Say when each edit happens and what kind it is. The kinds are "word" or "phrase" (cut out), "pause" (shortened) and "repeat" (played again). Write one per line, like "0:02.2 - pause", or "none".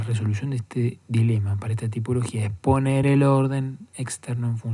none